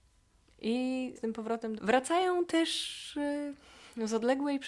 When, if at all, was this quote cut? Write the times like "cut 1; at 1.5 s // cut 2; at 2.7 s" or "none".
cut 1; at 1.2 s // cut 2; at 1.8 s